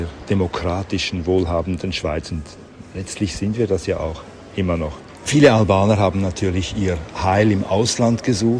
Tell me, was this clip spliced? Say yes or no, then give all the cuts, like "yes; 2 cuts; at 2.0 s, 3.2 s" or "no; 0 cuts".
no; 0 cuts